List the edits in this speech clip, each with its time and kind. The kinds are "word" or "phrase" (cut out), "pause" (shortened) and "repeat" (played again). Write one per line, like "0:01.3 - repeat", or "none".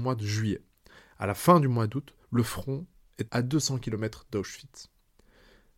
0:02.2 - pause
0:03.3 - word